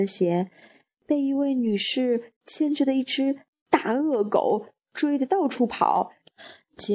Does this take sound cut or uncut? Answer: uncut